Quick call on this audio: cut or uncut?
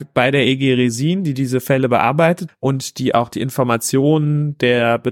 cut